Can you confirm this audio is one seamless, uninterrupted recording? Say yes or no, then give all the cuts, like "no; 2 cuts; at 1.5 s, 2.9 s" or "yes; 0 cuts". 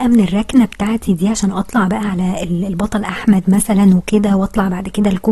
yes; 0 cuts